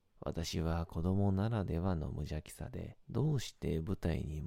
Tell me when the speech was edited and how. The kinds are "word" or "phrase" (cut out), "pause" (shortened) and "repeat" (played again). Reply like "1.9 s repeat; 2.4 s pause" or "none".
3.0 s pause

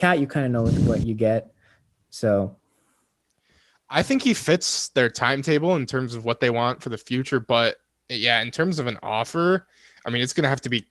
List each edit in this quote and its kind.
none

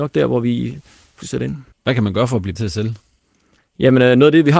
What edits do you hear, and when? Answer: 1.2 s phrase; 1.7 s pause; 2.6 s word

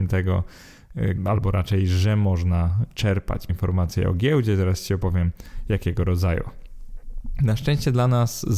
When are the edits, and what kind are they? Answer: 1.2 s word; 3.5 s word

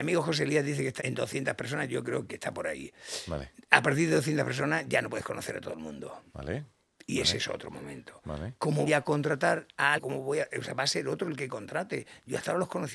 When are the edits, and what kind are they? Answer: 1.0 s word; 2.3 s word; 8.9 s word; 10.0 s word

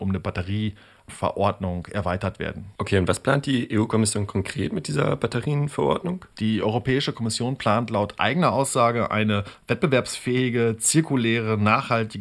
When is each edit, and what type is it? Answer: 2.8 s pause; 6.3 s pause

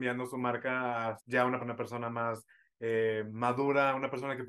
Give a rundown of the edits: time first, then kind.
1.2 s word; 1.6 s phrase

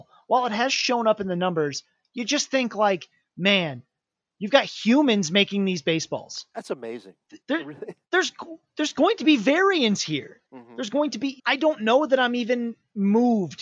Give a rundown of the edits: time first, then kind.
7.4 s pause; 10.5 s pause; 11.4 s word

